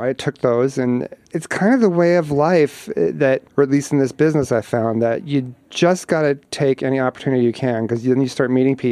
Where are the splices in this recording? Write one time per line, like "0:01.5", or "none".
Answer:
0:03.5
0:05.6